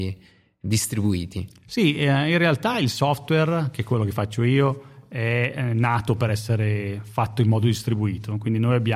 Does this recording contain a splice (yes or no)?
no